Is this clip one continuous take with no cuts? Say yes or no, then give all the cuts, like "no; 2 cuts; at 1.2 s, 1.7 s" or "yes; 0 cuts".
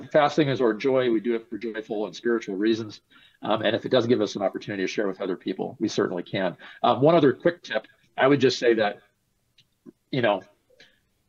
yes; 0 cuts